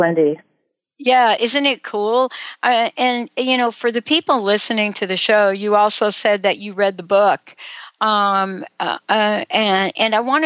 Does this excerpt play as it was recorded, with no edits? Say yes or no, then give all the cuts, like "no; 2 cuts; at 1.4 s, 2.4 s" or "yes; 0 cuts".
yes; 0 cuts